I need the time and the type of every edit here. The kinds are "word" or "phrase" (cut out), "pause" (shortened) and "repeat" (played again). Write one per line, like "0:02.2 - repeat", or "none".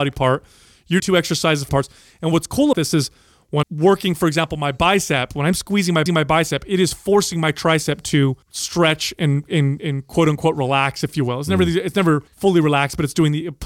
0:01.0 - word
0:01.7 - phrase
0:02.7 - word
0:03.6 - word
0:06.1 - repeat
0:08.4 - pause
0:12.3 - pause